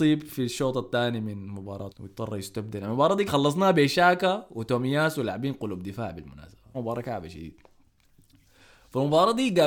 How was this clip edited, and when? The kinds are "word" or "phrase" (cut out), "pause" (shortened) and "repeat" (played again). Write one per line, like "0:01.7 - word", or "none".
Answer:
0:01.9 - word
0:03.3 - word
0:06.7 - phrase

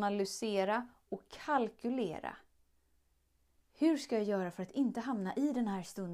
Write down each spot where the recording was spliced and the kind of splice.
none

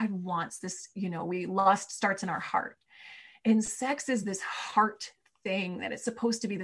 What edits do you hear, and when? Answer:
none

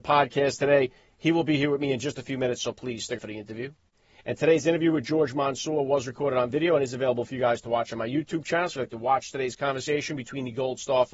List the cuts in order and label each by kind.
0:03.2 - word

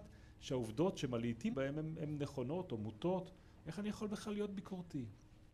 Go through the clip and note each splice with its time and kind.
0:01.5 - word

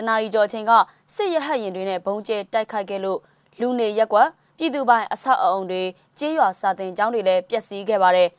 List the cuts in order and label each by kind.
none

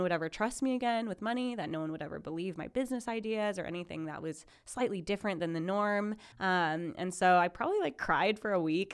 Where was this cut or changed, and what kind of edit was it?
0:06.3 - pause

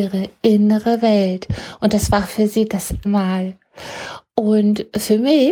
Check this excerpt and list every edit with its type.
0:03.0 - word

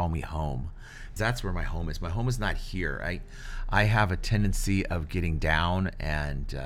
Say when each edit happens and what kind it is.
0:01.2 - word

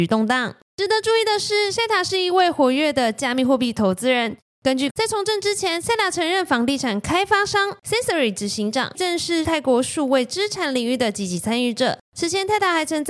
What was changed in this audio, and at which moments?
0:04.9 - phrase
0:08.9 - phrase

